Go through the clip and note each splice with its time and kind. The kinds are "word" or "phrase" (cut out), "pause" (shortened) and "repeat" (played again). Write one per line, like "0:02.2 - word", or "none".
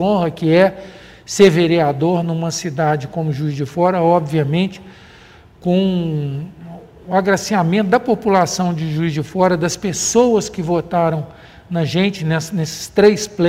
none